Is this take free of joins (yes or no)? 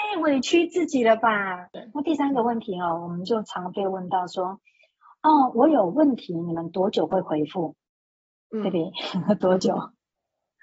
yes